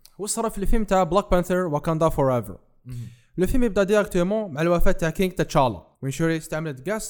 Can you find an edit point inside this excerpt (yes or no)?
yes